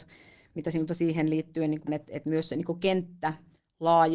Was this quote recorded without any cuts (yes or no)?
no